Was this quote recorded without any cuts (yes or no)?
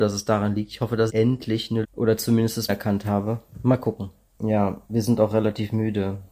no